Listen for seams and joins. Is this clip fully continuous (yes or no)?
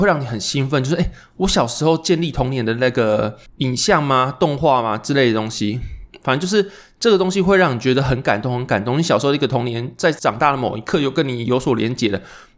yes